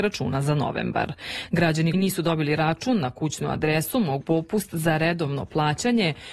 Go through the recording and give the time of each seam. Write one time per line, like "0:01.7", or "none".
0:01.9
0:04.2